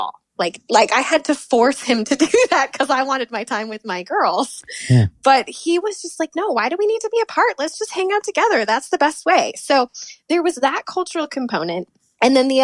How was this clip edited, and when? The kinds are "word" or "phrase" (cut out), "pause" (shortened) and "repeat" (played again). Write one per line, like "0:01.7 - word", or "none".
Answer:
none